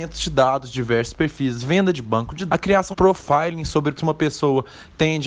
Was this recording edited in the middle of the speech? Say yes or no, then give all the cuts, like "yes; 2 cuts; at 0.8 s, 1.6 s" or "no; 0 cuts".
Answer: yes; 3 cuts; at 2.5 s, 2.9 s, 4.0 s